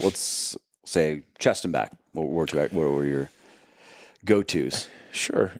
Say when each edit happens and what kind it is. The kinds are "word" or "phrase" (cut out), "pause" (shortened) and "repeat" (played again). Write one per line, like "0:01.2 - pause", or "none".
none